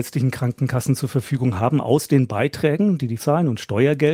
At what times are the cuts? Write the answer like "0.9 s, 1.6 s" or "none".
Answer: 3.2 s